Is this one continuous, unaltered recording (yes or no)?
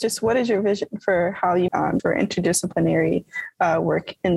no